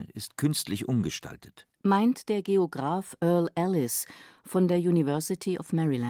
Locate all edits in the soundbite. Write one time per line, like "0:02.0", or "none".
0:01.7